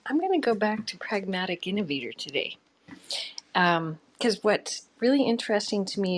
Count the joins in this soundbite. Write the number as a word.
zero